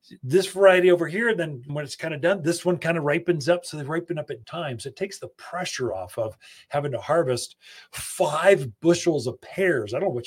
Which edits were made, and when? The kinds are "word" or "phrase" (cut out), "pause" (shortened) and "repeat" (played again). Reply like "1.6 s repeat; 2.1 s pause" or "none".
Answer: 1.7 s word; 4.4 s word